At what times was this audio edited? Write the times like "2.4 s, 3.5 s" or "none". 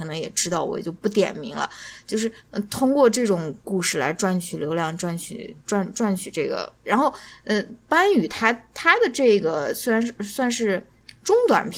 2.4 s